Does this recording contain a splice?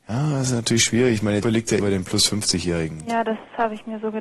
yes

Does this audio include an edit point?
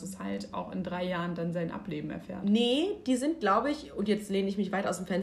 no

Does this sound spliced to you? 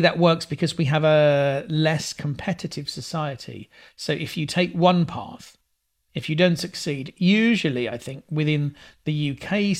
no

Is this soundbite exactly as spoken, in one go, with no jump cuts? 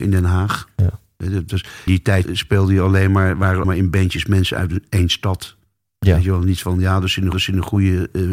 no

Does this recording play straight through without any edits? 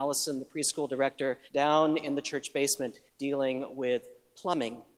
no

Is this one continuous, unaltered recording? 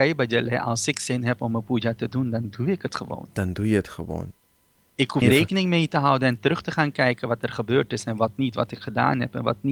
no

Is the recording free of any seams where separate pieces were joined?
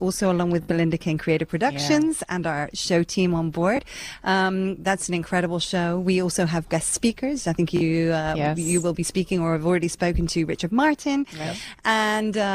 yes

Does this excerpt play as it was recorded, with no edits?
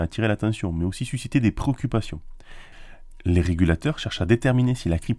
yes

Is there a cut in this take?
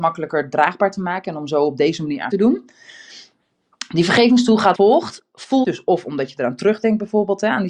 yes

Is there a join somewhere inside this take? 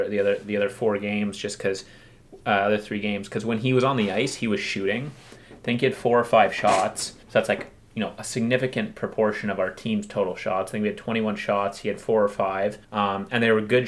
yes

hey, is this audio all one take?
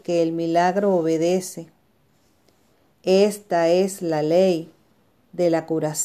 yes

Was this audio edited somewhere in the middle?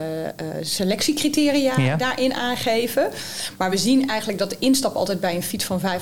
no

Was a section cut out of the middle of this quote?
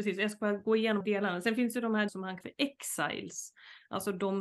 yes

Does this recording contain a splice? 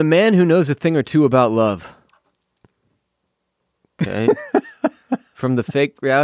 no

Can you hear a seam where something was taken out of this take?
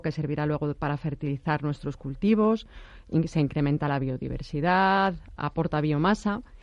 yes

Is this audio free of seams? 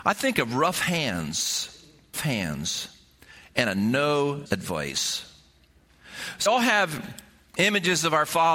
no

